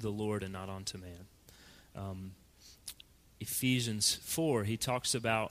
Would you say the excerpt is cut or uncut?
uncut